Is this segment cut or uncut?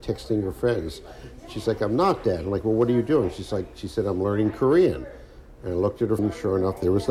cut